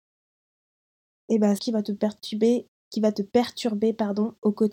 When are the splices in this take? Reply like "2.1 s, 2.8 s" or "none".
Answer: 1.6 s